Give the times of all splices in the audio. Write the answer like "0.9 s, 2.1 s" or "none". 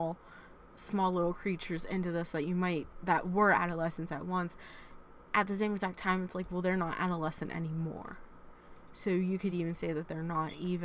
none